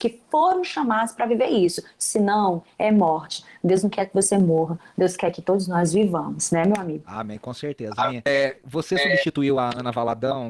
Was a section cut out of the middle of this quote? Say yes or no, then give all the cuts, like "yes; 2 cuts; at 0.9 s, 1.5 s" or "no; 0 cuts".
no; 0 cuts